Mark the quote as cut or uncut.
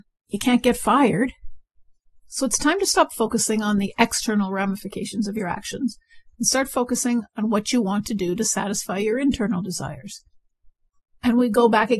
uncut